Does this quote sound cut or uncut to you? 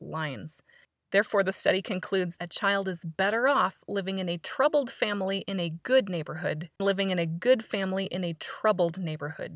cut